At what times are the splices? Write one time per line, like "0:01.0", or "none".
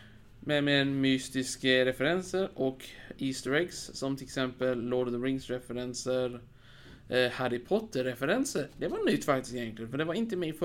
none